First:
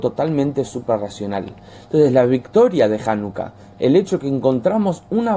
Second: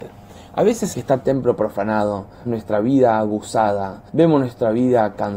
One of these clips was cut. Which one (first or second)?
second